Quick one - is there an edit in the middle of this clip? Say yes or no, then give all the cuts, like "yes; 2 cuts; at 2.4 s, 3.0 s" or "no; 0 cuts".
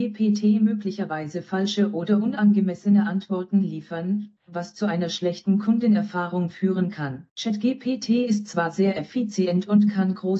yes; 2 cuts; at 4.4 s, 7.3 s